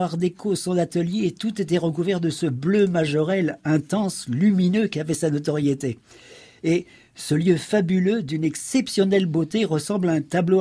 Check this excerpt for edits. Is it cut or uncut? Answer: uncut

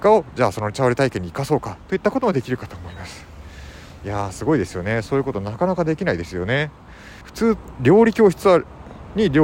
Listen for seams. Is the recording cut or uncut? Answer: cut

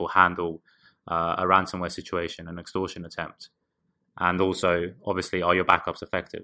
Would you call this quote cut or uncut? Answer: uncut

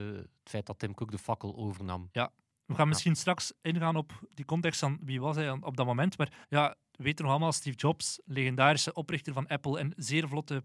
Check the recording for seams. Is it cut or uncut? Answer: cut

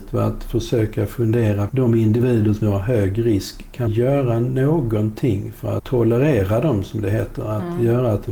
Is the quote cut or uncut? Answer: cut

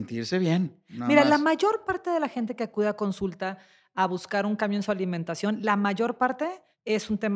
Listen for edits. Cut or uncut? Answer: uncut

